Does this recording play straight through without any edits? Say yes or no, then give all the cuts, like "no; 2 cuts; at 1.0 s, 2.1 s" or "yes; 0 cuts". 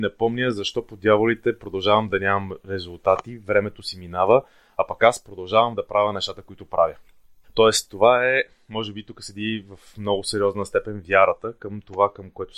yes; 0 cuts